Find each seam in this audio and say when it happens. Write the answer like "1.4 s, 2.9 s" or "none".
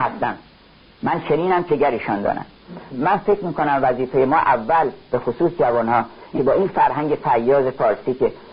1.7 s, 2.9 s, 6.4 s